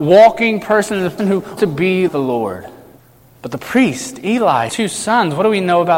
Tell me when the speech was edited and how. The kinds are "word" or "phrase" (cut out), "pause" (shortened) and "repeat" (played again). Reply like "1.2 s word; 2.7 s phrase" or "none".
1.2 s word; 1.6 s word; 2.1 s word; 3.0 s pause; 4.7 s word